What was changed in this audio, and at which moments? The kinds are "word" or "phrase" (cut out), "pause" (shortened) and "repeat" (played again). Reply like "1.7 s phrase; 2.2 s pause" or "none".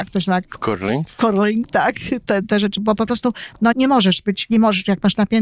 2.8 s word; 3.7 s word